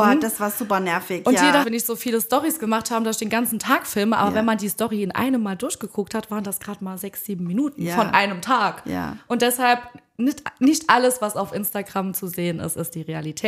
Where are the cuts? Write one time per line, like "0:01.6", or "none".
0:01.6